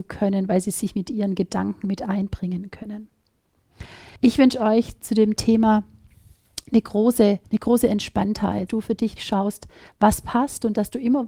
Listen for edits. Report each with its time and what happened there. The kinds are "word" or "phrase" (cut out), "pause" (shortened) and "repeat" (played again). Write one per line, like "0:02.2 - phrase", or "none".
0:04.2 - pause
0:07.4 - pause
0:08.7 - word
0:09.2 - word